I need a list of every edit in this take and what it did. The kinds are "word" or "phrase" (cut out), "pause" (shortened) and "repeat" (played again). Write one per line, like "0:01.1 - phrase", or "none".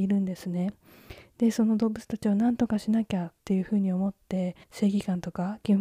0:03.4 - pause
0:04.6 - pause